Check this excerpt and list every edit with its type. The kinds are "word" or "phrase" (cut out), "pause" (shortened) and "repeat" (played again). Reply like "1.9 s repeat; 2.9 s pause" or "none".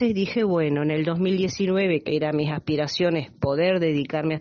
2.1 s word